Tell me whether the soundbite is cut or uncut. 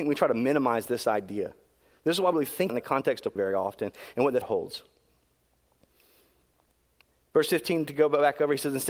cut